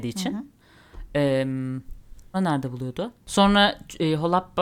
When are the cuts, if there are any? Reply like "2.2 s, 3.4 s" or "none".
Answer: 2.3 s